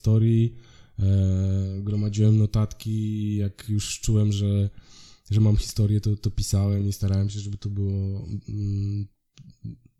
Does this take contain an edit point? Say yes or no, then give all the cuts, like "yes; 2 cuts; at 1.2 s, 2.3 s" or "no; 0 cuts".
no; 0 cuts